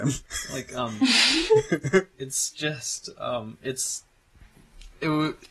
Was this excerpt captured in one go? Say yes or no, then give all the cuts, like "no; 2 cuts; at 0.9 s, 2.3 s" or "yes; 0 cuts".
yes; 0 cuts